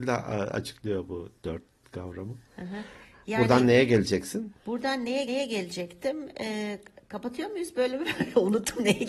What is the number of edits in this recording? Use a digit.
3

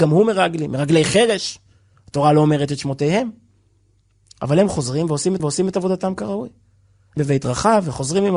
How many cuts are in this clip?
2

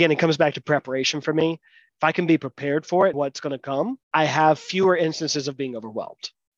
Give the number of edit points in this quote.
2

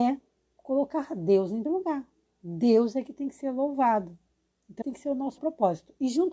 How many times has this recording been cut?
3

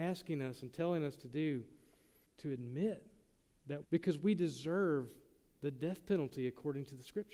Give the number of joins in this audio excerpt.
2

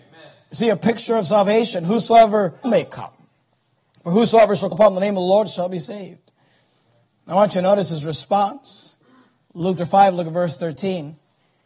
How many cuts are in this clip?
3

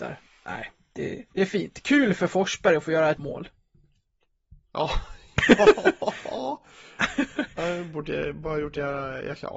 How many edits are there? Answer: 2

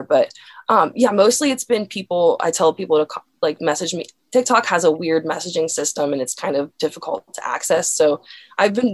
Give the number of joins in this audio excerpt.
0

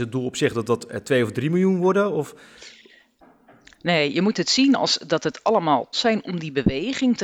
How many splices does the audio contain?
1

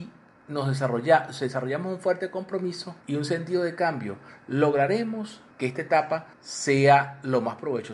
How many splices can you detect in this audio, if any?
3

